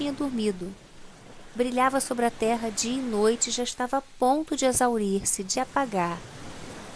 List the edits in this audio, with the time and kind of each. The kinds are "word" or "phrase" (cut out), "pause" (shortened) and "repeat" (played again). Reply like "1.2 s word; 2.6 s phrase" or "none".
5.5 s word